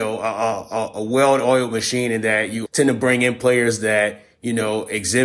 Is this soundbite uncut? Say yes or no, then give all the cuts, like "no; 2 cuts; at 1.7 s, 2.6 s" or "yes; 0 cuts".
no; 1 cut; at 2.7 s